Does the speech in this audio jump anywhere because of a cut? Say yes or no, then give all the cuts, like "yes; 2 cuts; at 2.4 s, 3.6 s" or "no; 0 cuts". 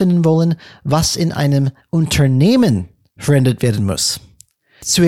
no; 0 cuts